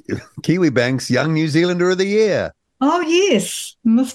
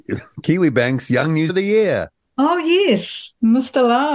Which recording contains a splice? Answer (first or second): second